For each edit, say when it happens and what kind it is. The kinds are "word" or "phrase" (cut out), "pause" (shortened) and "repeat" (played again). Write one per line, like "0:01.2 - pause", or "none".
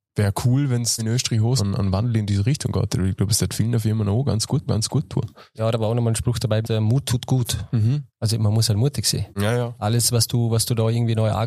0:01.0 - word
0:01.6 - word
0:04.7 - repeat
0:06.6 - word
0:08.1 - pause
0:09.3 - pause